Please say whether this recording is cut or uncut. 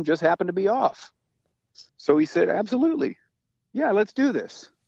cut